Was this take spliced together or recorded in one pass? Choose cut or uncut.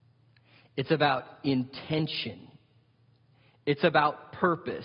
uncut